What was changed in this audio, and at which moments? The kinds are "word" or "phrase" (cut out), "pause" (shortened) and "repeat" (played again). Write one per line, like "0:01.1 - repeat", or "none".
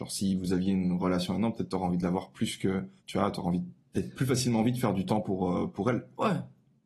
0:03.0 - pause